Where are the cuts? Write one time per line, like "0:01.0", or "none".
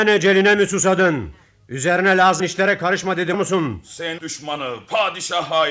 0:02.4
0:03.3
0:04.2